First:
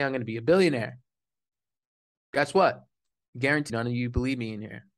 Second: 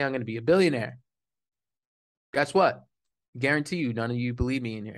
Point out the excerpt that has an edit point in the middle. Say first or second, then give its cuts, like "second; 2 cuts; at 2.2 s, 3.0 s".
first; 1 cut; at 3.7 s